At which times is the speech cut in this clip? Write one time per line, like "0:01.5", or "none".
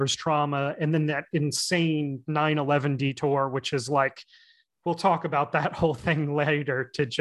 none